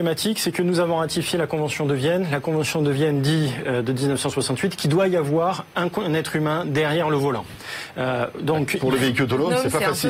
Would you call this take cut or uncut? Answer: uncut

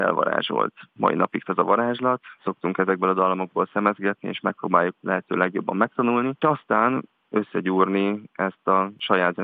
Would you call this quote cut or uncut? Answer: cut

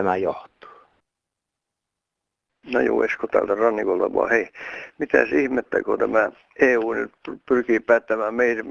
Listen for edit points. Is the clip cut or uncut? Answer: uncut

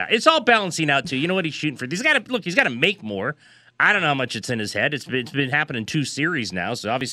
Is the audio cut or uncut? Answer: uncut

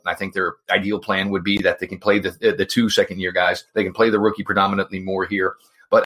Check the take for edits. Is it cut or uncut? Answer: cut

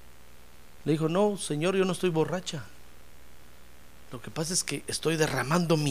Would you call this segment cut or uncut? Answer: uncut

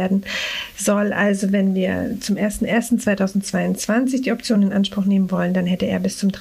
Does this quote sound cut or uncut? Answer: uncut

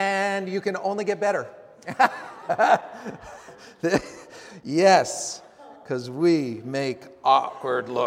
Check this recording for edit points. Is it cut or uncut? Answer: uncut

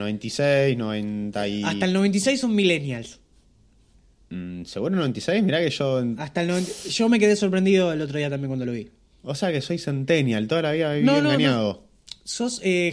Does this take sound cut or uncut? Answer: uncut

